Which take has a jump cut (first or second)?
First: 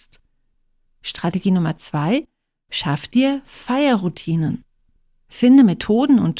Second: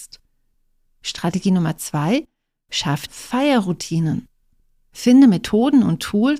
second